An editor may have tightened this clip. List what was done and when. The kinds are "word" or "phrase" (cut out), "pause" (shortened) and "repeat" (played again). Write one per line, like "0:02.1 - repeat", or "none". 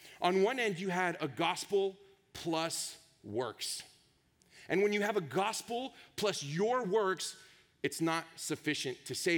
none